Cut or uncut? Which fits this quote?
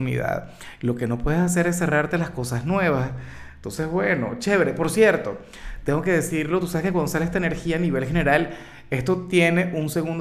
uncut